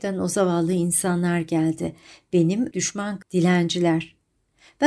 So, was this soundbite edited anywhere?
yes; 2 cuts; at 2.7 s, 3.2 s

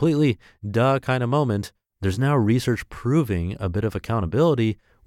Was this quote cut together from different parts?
yes; 1 cut; at 1.9 s

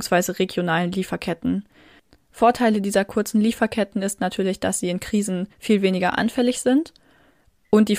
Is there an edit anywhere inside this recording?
yes; 1 cut; at 5.5 s

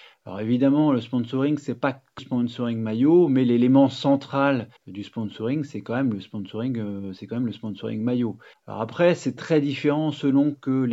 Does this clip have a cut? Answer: yes; 4 cuts; at 2.2 s, 4.8 s, 8.5 s, 9.4 s

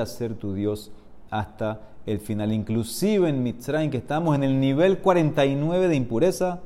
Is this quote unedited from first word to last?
yes; 0 cuts

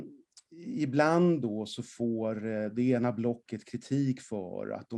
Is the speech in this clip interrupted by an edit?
no; 0 cuts

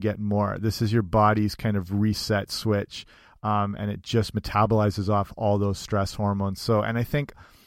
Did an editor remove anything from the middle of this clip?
no; 0 cuts

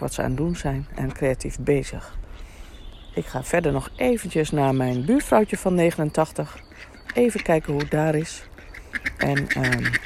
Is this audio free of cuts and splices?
yes; 0 cuts

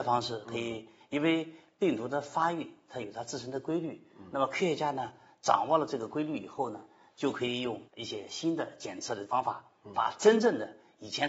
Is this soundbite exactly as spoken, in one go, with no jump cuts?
no; 1 cut; at 7.9 s

